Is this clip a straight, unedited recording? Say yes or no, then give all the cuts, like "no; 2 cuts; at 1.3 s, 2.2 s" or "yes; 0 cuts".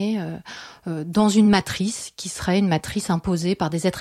yes; 0 cuts